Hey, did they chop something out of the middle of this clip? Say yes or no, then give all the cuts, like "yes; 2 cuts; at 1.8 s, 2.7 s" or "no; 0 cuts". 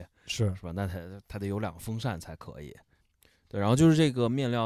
yes; 1 cut; at 3.0 s